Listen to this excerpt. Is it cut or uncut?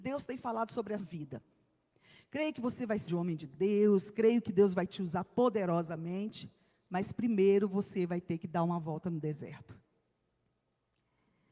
cut